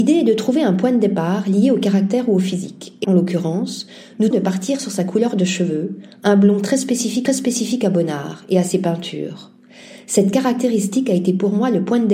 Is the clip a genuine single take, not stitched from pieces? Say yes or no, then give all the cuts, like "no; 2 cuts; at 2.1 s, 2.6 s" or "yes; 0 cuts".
no; 3 cuts; at 3.0 s, 4.3 s, 7.3 s